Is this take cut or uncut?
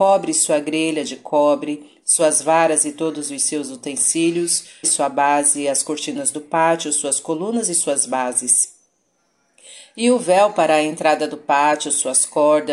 cut